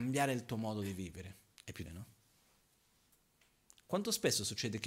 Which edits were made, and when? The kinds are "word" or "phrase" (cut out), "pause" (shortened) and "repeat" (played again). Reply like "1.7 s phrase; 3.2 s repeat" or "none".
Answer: 1.5 s pause; 1.9 s word